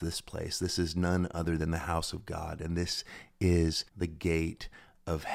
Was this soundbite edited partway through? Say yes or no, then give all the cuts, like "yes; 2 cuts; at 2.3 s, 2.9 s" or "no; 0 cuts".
yes; 1 cut; at 3.9 s